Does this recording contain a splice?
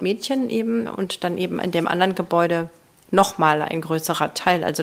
no; 0 cuts

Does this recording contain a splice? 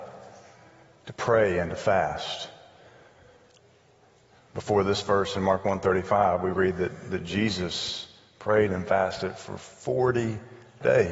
no; 0 cuts

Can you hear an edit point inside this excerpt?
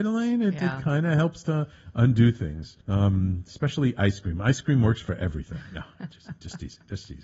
yes; 1 cut; at 2.8 s

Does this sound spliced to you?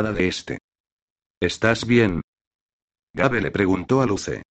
no; 0 cuts

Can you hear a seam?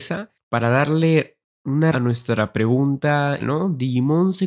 yes; 2 cuts; at 1.9 s, 3.4 s

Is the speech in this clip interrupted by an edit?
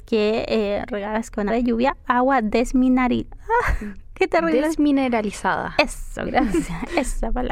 yes; 4 cuts; at 1.5 s, 2.0 s, 3.3 s, 6.3 s

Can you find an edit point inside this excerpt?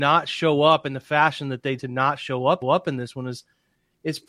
yes; 2 cuts; at 1.8 s, 2.6 s

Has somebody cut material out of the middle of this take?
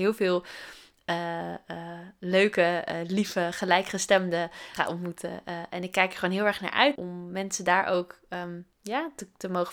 yes; 3 cuts; at 4.8 s, 7.0 s, 8.7 s

